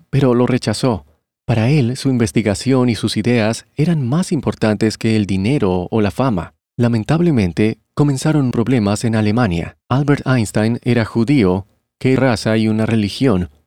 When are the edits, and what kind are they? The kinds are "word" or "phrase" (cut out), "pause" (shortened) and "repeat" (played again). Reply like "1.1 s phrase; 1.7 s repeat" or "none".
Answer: 6.7 s pause; 8.5 s word; 9.8 s pause; 12.2 s phrase